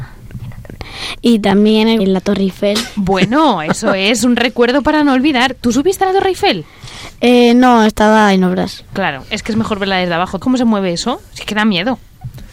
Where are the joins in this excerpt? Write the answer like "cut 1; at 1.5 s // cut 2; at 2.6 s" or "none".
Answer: cut 1; at 2.0 s // cut 2; at 10.4 s